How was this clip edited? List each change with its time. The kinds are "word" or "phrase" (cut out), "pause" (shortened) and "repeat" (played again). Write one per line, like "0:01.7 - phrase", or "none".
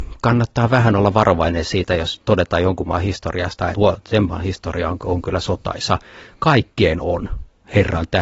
0:03.7 - phrase